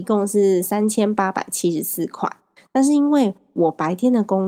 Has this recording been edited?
no; 0 cuts

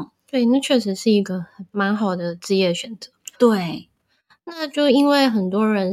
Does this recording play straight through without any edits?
no; 1 cut; at 3.3 s

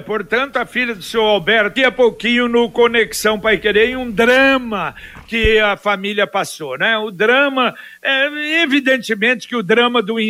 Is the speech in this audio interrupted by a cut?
yes; 1 cut; at 1.8 s

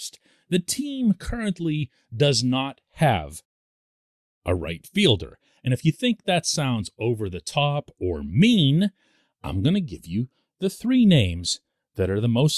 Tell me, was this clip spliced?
no; 0 cuts

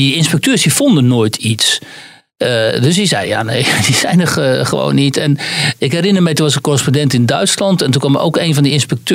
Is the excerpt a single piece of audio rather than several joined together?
yes; 0 cuts

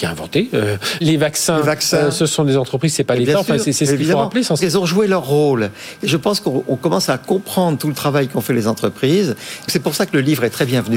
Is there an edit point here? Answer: yes; 3 cuts; at 1.0 s, 4.6 s, 9.7 s

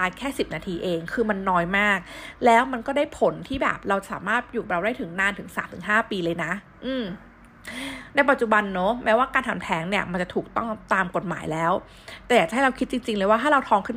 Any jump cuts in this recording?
no; 0 cuts

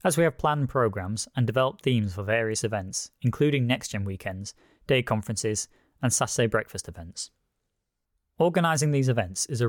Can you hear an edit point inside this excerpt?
no; 0 cuts

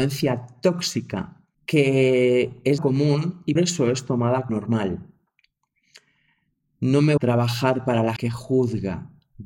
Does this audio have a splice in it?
yes; 6 cuts; at 1.5 s, 2.8 s, 3.6 s, 4.5 s, 7.2 s, 8.2 s

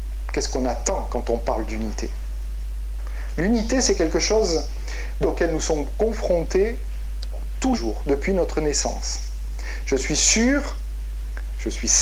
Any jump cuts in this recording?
yes; 2 cuts; at 5.2 s, 7.7 s

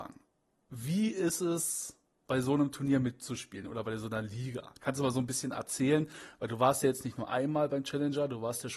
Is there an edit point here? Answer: no; 0 cuts

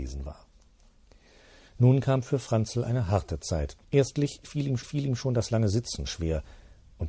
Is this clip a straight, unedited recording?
no; 2 cuts; at 3.8 s, 4.8 s

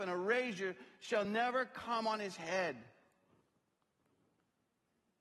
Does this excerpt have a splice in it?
no; 0 cuts

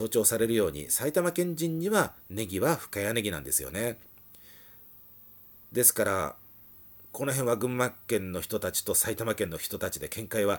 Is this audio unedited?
no; 1 cut; at 6.7 s

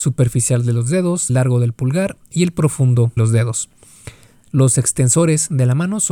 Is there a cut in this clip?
yes; 2 cuts; at 1.3 s, 3.2 s

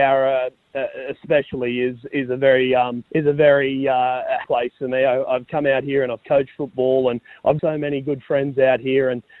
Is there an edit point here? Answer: yes; 3 cuts; at 3.1 s, 4.4 s, 7.6 s

